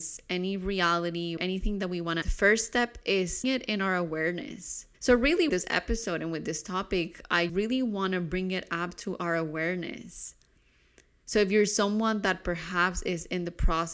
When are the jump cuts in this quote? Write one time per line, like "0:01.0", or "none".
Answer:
0:01.4
0:02.2
0:03.4
0:04.9
0:05.5
0:07.5